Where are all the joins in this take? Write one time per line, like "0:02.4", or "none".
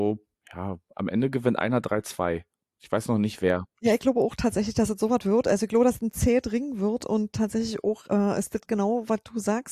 none